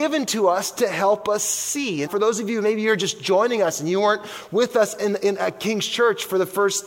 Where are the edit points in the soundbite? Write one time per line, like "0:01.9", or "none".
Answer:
0:02.1